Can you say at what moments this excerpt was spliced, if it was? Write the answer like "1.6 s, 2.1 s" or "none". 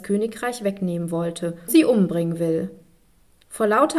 1.7 s